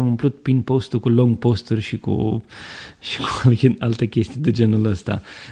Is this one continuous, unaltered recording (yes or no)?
yes